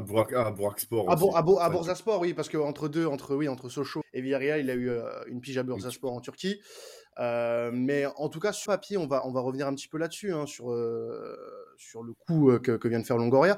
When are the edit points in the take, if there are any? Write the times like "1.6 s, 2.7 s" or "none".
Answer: 4.0 s, 8.7 s